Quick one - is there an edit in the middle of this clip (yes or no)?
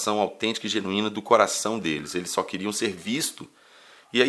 no